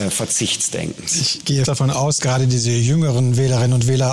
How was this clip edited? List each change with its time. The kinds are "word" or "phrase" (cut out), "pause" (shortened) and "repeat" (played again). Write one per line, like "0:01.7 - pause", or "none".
0:01.7 - word
0:02.2 - word